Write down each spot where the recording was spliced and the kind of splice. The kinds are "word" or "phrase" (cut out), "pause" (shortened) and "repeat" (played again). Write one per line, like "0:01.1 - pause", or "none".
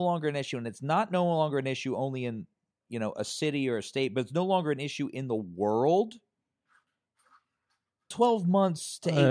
none